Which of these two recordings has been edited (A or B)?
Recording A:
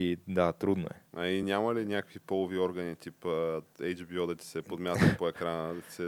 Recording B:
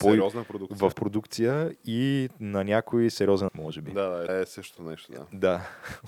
B